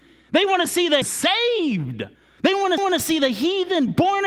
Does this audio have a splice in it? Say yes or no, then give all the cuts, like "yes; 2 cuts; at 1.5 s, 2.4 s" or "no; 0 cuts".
yes; 3 cuts; at 1.0 s, 2.1 s, 2.8 s